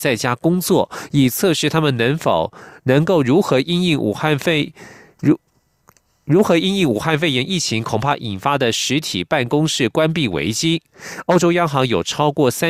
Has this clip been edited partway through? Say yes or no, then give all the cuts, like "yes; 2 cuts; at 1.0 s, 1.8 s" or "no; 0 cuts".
no; 0 cuts